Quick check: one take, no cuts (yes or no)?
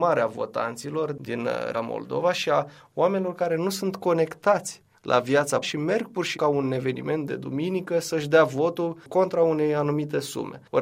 no